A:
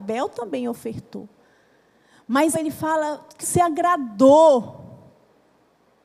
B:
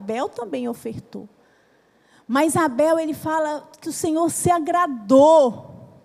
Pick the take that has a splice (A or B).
A